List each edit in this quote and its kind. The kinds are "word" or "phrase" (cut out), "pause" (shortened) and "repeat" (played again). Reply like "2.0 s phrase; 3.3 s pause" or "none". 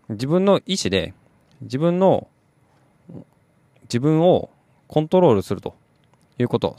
none